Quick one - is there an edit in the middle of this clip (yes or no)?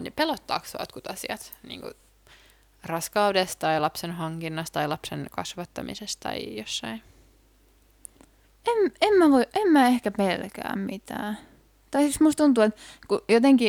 no